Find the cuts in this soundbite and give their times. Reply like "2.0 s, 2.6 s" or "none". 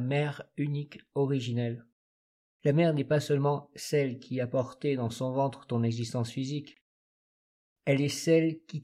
2.3 s